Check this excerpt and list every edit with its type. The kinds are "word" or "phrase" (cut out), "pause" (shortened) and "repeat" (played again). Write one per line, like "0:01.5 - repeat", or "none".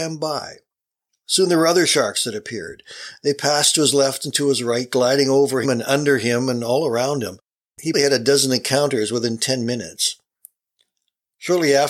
0:05.6 - word
0:07.9 - word